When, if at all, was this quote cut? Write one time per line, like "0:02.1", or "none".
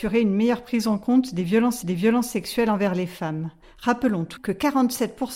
0:01.8
0:03.6
0:04.4